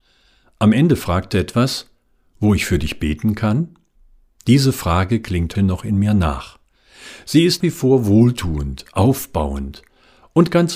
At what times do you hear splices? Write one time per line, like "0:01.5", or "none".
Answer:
0:01.3
0:04.0
0:05.5
0:07.6

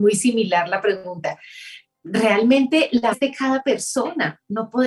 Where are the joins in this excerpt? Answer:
0:03.1

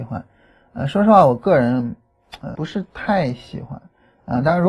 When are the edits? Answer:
0:02.5

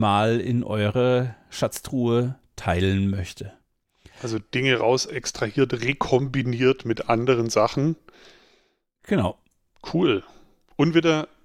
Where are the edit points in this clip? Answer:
none

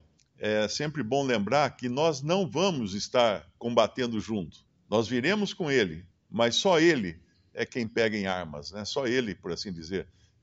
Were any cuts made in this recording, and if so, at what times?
none

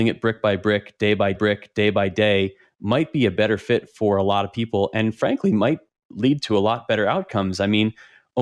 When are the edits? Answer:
0:01.3

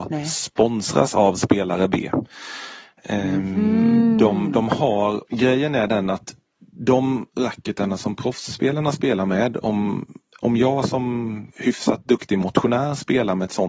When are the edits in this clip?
0:05.3
0:10.3
0:11.5

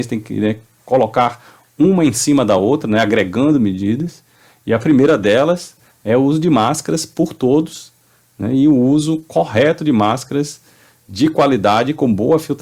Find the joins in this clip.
none

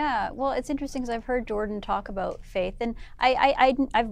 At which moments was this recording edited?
none

